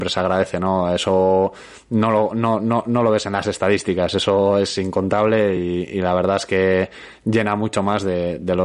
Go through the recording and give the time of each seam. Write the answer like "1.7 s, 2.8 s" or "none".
none